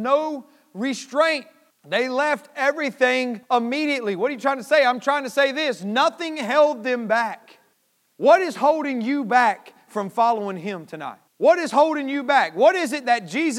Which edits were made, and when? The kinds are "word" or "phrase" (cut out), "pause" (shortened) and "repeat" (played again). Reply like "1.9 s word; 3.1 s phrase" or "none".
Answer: 1.7 s pause; 3.4 s pause; 7.7 s pause; 11.3 s pause